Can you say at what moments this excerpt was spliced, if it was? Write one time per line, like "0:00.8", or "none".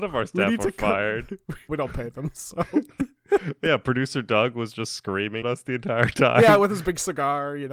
0:01.7
0:05.4